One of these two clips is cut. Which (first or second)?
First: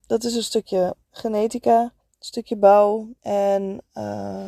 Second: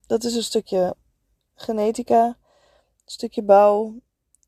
first